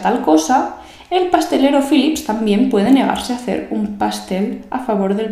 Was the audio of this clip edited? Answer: no; 0 cuts

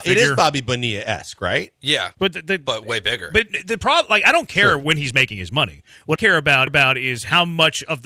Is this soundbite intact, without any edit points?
no; 3 cuts; at 2.1 s, 6.1 s, 6.7 s

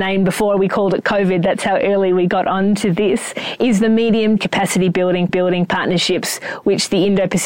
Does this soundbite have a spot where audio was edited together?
yes; 2 cuts; at 4.4 s, 5.3 s

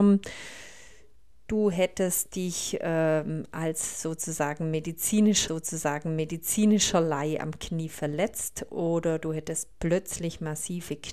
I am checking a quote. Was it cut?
yes; 1 cut; at 5.5 s

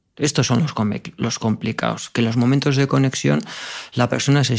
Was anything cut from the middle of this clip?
no; 0 cuts

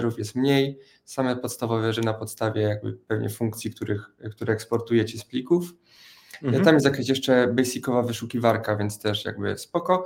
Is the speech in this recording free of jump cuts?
no; 1 cut; at 1.9 s

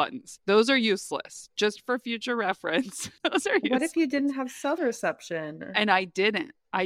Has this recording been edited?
yes; 1 cut; at 4.8 s

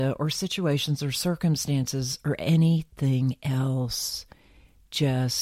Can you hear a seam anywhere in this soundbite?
no; 0 cuts

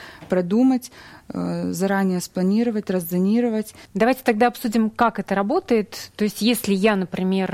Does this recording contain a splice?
no; 0 cuts

